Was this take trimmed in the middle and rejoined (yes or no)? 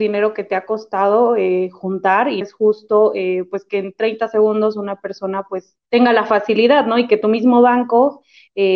yes